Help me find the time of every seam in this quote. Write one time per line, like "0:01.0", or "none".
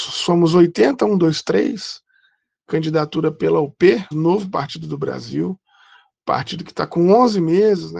0:04.1